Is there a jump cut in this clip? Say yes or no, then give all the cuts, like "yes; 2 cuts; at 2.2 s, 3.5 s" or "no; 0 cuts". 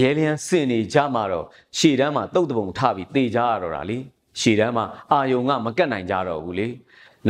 no; 0 cuts